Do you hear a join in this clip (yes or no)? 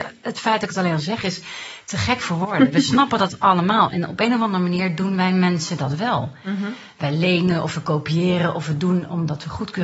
no